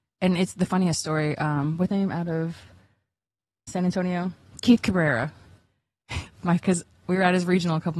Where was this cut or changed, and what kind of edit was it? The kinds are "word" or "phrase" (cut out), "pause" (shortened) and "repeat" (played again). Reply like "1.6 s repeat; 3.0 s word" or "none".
1.9 s word; 3.7 s word; 6.3 s word; 6.6 s word